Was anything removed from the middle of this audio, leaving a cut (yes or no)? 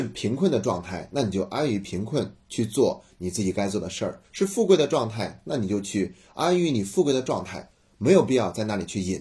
yes